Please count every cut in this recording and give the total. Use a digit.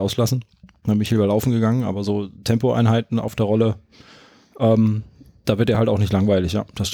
0